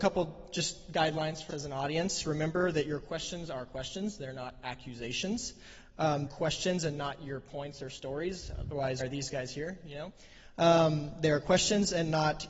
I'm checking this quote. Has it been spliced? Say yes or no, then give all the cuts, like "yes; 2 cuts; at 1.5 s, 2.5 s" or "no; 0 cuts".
yes; 3 cuts; at 1.5 s, 6.3 s, 9.0 s